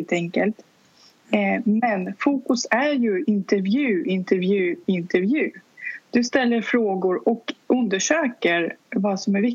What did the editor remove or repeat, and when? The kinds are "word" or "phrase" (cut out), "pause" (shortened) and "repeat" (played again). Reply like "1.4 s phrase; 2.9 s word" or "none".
7.6 s pause